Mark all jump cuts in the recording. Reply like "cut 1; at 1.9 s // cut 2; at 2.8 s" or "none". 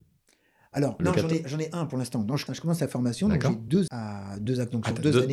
cut 1; at 1.0 s // cut 2; at 2.5 s // cut 3; at 3.9 s